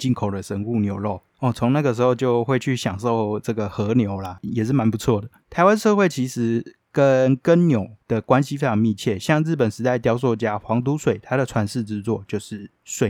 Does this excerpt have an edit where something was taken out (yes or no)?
yes